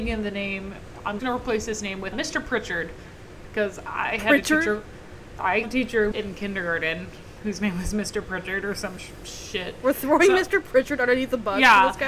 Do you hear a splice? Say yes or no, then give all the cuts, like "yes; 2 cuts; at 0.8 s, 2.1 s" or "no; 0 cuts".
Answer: yes; 4 cuts; at 1.2 s, 2.1 s, 5.6 s, 6.1 s